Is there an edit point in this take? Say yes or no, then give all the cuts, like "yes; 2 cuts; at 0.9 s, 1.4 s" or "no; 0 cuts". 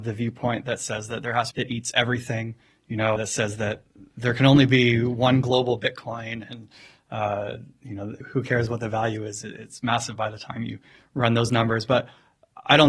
yes; 3 cuts; at 1.5 s, 3.2 s, 8.2 s